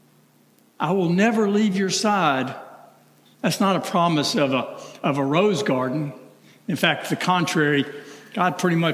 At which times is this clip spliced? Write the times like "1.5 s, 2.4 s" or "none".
none